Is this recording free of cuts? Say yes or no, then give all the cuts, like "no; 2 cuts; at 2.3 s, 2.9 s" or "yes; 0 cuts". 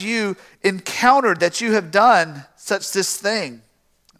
yes; 0 cuts